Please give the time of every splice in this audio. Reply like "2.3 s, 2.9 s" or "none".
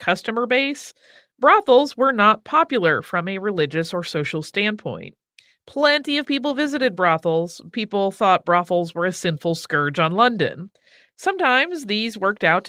7.7 s

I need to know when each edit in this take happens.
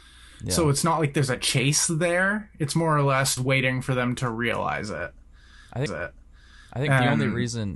3.4 s, 5.9 s

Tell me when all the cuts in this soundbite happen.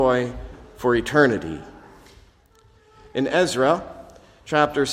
none

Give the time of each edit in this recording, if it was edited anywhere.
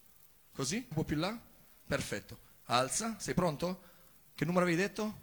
0.9 s

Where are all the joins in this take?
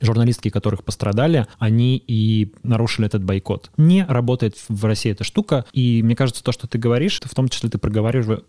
1.5 s, 5.7 s, 7.2 s

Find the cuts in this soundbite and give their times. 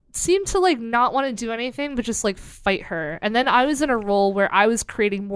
none

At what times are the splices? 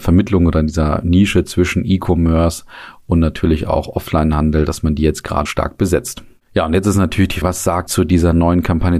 5.5 s, 7.4 s, 7.9 s

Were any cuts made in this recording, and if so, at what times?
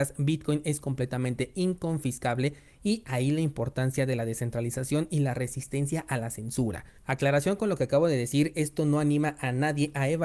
7.0 s

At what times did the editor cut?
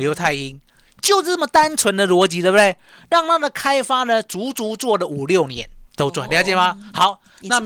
5.9 s, 6.3 s

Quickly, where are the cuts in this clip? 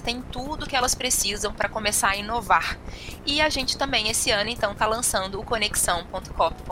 none

